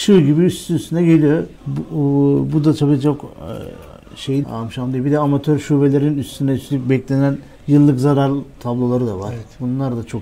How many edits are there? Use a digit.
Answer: 3